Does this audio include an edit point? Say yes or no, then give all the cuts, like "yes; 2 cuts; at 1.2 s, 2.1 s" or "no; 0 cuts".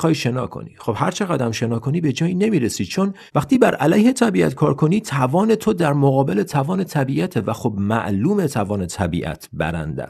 yes; 1 cut; at 3.3 s